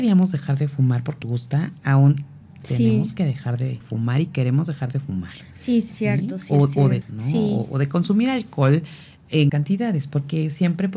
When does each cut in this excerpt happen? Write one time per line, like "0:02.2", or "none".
0:01.2
0:02.4
0:03.8
0:05.9
0:07.0
0:09.5